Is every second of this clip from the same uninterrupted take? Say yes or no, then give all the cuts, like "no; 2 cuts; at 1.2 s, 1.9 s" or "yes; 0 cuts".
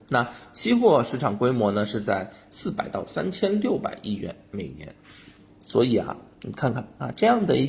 yes; 0 cuts